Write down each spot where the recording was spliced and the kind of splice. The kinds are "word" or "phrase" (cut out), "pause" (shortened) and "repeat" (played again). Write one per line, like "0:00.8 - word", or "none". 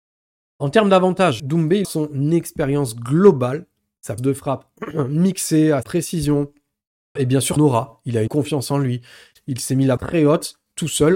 0:01.4 - word
0:01.8 - word
0:04.2 - word
0:05.8 - word
0:07.2 - word
0:07.6 - word
0:08.3 - word
0:10.0 - word